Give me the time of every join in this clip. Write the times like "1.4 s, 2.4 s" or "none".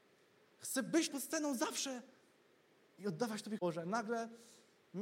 1.1 s, 3.6 s